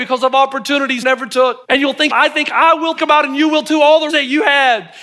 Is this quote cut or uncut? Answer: cut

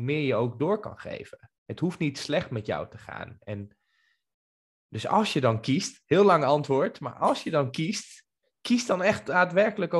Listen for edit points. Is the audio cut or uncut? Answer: uncut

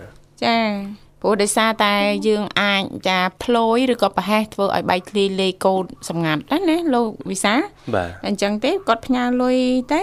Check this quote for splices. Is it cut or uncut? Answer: cut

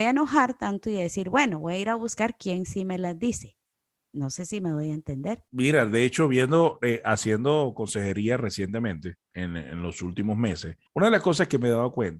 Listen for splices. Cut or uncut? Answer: cut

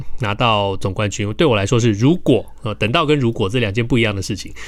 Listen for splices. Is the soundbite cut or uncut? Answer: uncut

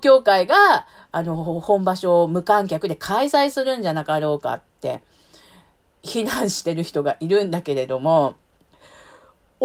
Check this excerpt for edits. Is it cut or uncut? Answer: cut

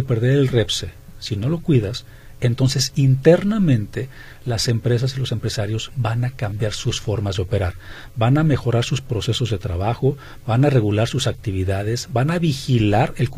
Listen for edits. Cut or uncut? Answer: uncut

